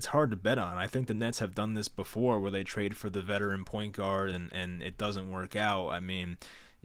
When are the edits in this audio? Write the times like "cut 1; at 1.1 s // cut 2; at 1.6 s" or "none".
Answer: none